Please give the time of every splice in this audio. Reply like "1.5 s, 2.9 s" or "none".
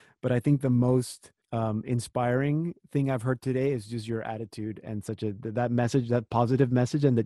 1.4 s